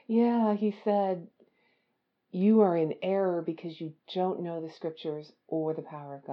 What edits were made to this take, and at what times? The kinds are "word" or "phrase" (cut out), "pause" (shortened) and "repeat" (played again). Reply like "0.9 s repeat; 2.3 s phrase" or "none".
none